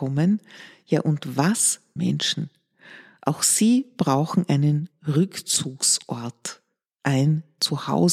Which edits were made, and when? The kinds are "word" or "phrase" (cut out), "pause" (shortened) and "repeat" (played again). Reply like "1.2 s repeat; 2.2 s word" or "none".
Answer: 2.0 s phrase